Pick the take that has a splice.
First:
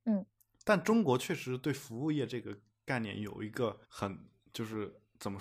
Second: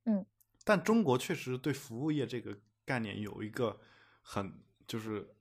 first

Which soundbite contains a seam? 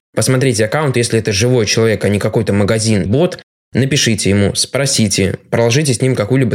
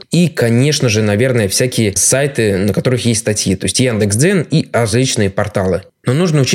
first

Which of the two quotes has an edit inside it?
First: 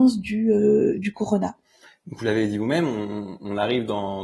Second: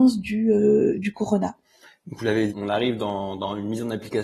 second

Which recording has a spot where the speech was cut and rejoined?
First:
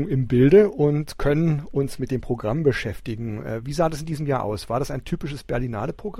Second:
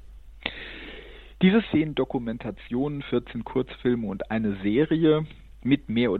second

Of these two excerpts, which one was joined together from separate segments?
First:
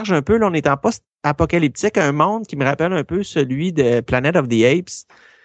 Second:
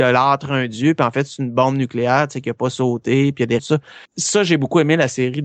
second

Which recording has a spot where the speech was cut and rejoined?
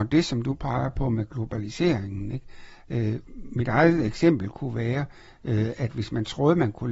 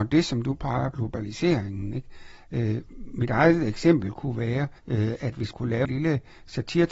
second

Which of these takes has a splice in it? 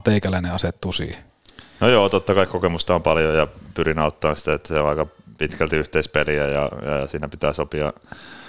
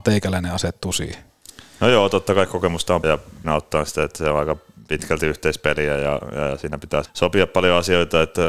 second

